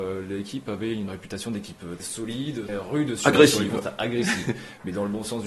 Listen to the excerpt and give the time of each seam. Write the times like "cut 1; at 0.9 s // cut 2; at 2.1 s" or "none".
cut 1; at 1.1 s // cut 2; at 2.0 s // cut 3; at 2.7 s

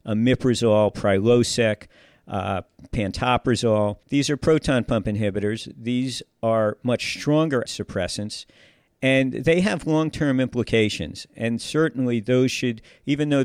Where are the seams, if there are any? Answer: cut 1; at 4.0 s // cut 2; at 7.7 s

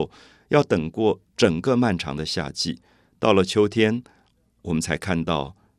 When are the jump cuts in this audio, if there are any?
cut 1; at 1.3 s

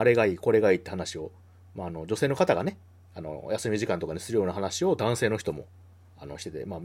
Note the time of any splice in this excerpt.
none

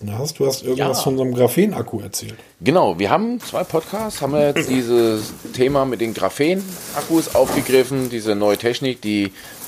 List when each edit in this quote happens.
cut 1; at 3.4 s

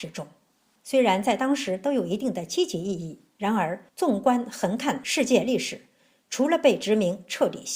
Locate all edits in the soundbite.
none

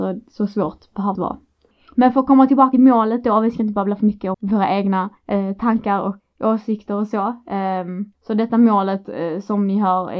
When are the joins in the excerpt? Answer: cut 1; at 1.1 s // cut 2; at 2.7 s // cut 3; at 4.3 s // cut 4; at 5.2 s // cut 5; at 6.2 s // cut 6; at 8.1 s

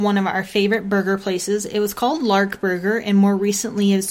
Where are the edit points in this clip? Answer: none

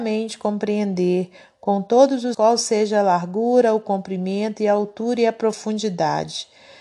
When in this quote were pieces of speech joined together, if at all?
cut 1; at 2.3 s

